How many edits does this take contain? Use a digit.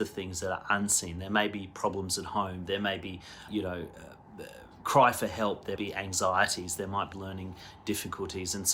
3